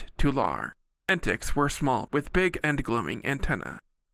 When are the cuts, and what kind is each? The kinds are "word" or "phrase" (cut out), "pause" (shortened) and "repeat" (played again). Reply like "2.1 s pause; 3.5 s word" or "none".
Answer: 2.1 s word; 2.6 s word